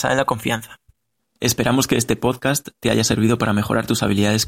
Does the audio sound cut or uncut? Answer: cut